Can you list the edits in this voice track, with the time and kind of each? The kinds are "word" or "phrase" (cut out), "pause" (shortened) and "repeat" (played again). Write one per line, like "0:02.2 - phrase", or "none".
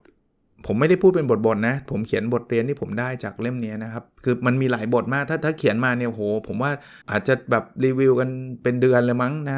0:07.0 - pause